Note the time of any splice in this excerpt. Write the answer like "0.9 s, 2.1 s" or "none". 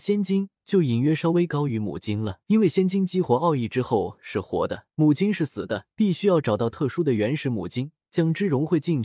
2.4 s, 4.9 s, 5.9 s, 8.1 s